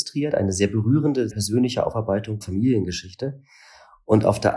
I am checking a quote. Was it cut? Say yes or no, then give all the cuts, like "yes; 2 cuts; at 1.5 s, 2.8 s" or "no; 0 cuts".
yes; 2 cuts; at 1.3 s, 2.4 s